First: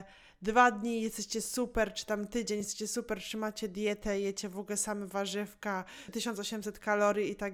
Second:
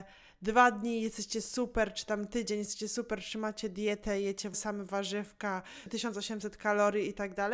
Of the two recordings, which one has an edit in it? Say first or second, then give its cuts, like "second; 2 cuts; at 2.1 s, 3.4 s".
second; 1 cut; at 4.5 s